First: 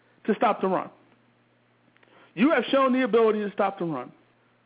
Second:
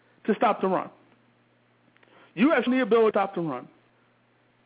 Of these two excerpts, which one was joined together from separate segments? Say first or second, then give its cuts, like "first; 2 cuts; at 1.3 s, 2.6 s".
second; 2 cuts; at 2.7 s, 3.1 s